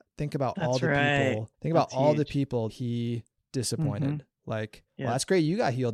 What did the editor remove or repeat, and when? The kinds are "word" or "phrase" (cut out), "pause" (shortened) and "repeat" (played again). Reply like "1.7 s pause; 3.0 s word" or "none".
1.5 s pause; 2.7 s word; 3.4 s word; 4.9 s pause